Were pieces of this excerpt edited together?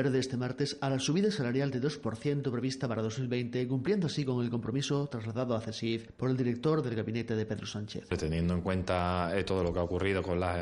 no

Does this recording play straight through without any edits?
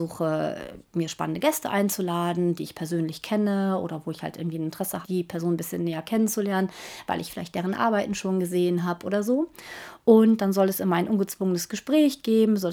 no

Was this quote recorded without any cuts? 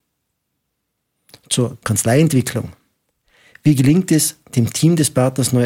yes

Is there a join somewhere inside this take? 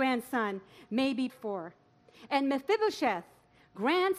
yes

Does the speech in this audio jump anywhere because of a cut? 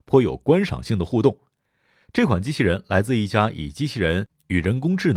no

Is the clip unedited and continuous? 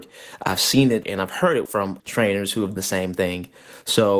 no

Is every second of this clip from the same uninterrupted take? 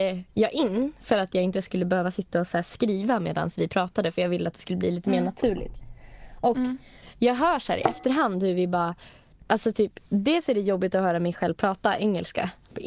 yes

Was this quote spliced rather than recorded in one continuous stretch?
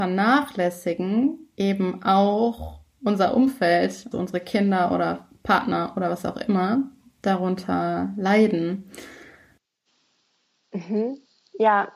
yes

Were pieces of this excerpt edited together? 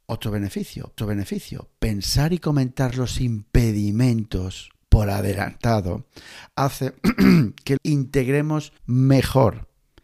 yes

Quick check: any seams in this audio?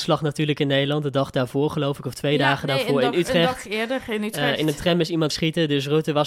yes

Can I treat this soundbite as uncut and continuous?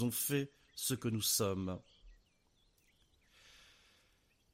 yes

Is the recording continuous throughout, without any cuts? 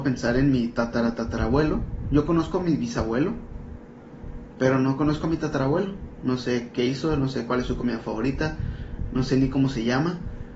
yes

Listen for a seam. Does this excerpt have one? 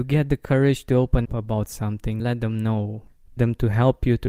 yes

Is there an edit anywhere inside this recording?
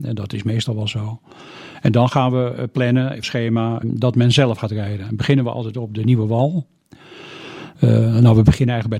yes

